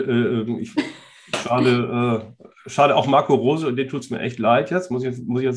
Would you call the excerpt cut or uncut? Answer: uncut